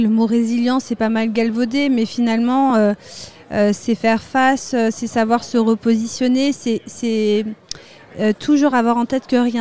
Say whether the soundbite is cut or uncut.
uncut